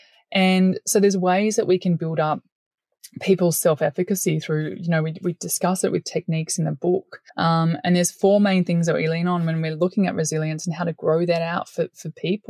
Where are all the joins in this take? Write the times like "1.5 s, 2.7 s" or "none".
7.3 s